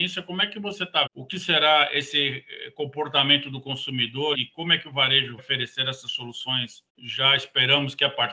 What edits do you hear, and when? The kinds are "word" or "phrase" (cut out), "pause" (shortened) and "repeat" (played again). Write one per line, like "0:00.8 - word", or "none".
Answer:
0:01.1 - word
0:04.3 - word
0:05.4 - word
0:06.9 - pause